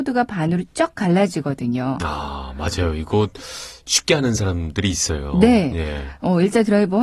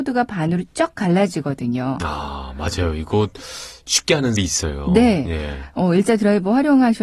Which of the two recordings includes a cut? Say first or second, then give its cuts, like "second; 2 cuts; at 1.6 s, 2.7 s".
second; 1 cut; at 4.4 s